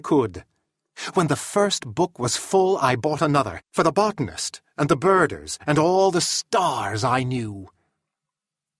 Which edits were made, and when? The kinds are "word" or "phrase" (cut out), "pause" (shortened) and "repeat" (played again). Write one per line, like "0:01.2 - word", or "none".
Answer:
0:03.6 - pause